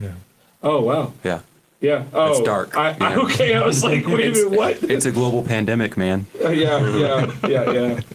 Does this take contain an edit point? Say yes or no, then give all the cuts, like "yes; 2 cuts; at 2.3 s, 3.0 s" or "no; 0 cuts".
no; 0 cuts